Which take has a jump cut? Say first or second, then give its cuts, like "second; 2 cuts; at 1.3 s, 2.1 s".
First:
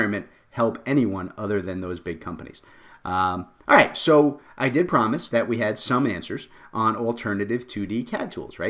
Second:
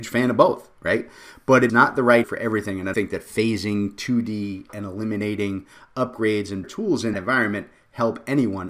second; 6 cuts; at 1.7 s, 2.2 s, 2.9 s, 4.7 s, 6.6 s, 7.1 s